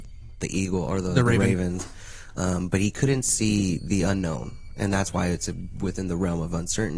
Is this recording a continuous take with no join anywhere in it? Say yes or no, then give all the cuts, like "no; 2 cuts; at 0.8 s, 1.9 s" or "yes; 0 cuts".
yes; 0 cuts